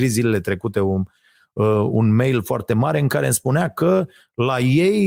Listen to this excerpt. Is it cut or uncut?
uncut